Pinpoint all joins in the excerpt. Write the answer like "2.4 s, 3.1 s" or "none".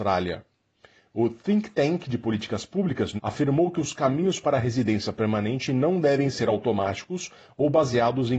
3.2 s